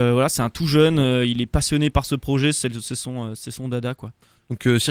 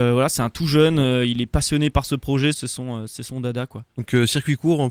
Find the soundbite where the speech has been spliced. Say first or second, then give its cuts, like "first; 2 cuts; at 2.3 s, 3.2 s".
second; 2 cuts; at 2.5 s, 3.9 s